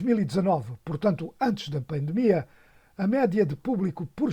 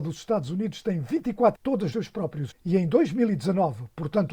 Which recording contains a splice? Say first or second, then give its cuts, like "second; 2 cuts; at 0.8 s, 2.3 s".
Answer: second; 3 cuts; at 1.5 s, 1.9 s, 2.5 s